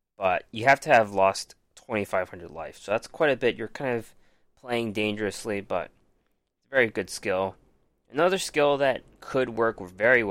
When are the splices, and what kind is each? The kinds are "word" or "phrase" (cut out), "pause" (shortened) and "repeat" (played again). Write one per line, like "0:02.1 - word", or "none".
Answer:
none